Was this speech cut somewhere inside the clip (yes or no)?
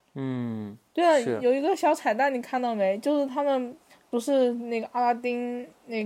no